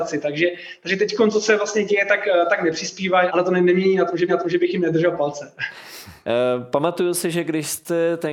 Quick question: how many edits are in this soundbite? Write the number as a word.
two